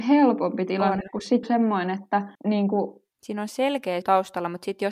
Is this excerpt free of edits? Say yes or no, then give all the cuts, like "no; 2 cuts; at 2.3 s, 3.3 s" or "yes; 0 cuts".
no; 4 cuts; at 1.4 s, 2.3 s, 3.1 s, 4.0 s